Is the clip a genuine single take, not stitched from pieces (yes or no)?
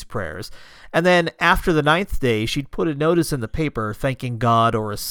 yes